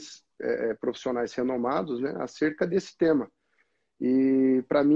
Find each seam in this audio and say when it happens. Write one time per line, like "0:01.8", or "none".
none